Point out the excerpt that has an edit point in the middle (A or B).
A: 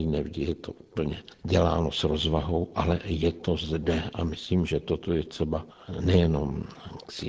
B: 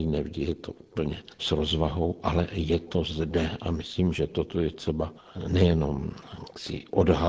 B